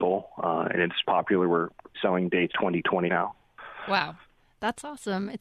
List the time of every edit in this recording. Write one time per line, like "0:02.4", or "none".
0:01.0
0:01.9
0:02.5
0:03.1